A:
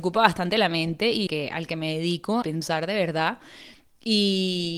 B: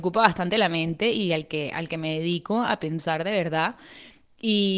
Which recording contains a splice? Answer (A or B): A